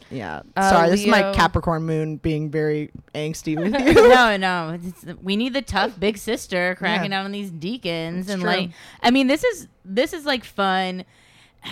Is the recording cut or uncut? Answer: uncut